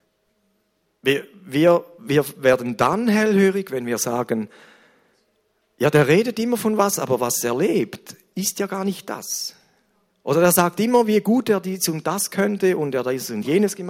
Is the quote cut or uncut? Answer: uncut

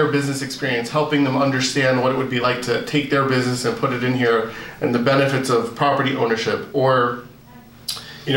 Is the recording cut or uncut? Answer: uncut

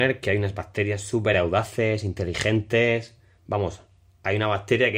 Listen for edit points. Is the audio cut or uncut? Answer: uncut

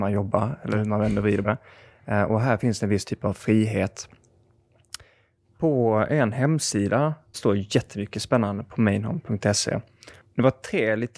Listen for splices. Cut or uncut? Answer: cut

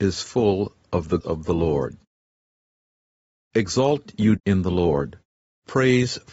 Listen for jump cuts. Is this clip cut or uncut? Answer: cut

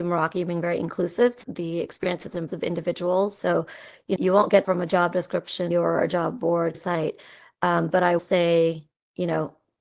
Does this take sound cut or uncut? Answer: cut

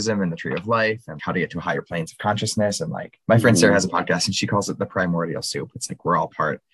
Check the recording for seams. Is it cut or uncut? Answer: cut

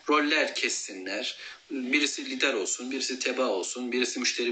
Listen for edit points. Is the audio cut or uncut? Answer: uncut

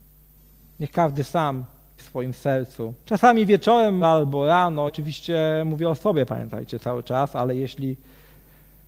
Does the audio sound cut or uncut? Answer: cut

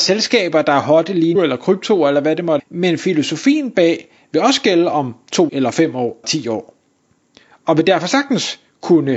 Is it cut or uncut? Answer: cut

